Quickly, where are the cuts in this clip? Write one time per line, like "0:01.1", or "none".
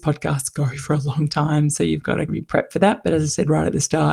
0:02.3